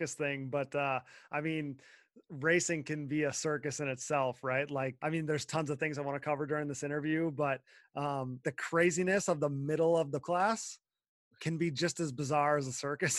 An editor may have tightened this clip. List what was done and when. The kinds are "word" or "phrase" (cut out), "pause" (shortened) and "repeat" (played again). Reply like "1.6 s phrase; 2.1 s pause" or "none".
5.0 s word; 8.4 s word; 10.2 s word; 11.3 s word